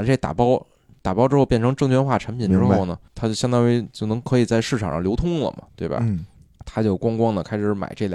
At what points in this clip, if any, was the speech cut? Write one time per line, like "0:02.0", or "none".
0:03.1
0:06.4